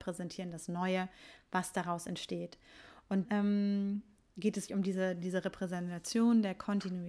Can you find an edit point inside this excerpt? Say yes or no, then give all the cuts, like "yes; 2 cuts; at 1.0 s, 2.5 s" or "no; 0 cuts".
yes; 2 cuts; at 3.2 s, 4.7 s